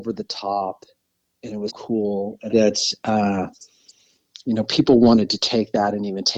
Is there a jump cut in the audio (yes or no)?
yes